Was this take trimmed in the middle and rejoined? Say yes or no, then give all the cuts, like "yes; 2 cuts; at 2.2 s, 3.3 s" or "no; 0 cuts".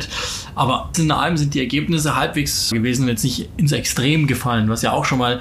yes; 2 cuts; at 0.9 s, 2.7 s